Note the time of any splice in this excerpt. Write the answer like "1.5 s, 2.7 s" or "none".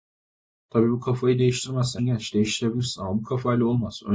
2.0 s